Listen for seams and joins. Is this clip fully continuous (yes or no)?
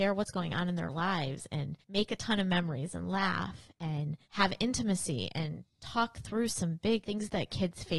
no